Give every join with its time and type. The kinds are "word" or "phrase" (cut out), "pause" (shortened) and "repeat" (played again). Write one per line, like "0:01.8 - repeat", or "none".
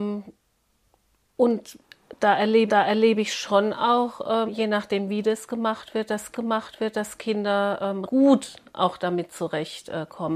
0:02.7 - repeat
0:04.5 - word
0:06.3 - repeat
0:08.0 - word